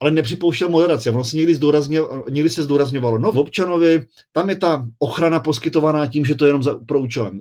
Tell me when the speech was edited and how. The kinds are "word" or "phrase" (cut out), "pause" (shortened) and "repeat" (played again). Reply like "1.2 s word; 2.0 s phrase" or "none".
3.3 s phrase